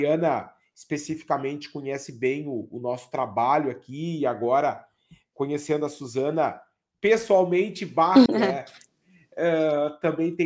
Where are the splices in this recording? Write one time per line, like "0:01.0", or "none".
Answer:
0:08.3